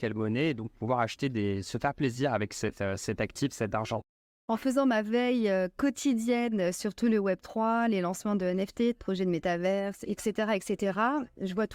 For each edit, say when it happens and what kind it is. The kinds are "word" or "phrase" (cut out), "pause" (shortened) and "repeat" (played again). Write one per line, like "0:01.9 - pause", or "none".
none